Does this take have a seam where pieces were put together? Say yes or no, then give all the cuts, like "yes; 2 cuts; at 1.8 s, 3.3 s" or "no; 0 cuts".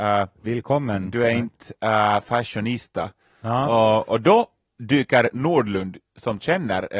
no; 0 cuts